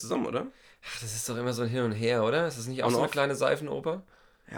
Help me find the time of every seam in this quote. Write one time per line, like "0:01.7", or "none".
none